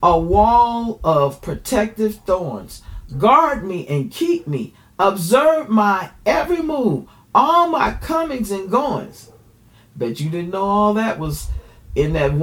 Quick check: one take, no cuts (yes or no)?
yes